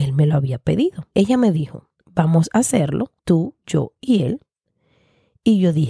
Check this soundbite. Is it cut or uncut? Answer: cut